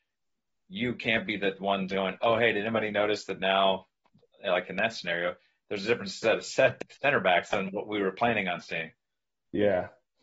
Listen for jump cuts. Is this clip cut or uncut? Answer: uncut